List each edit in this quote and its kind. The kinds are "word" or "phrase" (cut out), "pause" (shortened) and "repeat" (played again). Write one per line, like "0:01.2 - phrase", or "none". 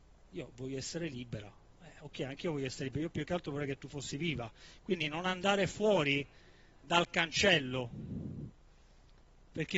none